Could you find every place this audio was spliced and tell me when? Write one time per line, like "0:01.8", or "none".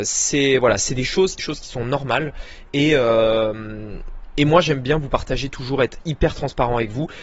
0:01.4